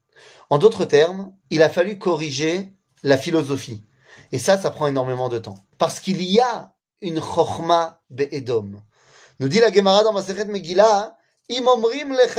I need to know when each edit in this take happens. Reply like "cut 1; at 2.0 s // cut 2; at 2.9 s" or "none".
cut 1; at 1.4 s // cut 2; at 5.7 s